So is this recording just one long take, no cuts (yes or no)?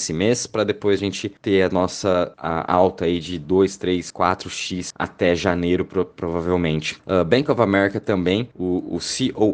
yes